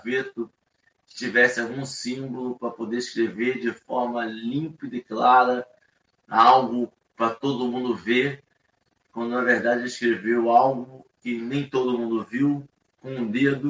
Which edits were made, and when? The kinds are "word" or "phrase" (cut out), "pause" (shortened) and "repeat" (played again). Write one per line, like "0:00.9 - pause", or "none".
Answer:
none

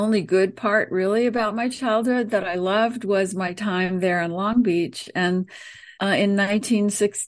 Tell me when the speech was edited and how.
0:05.9 - pause

